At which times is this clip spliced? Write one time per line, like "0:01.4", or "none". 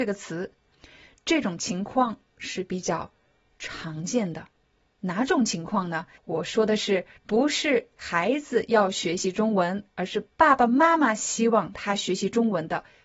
0:06.2
0:07.2

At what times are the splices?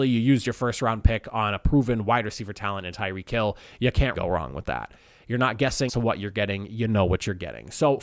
0:04.1
0:05.9

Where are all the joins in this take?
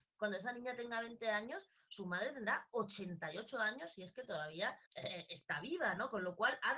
0:04.9

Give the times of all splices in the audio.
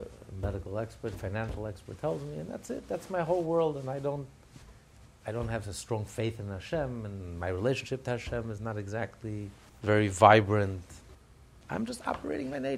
0:04.8
0:09.7

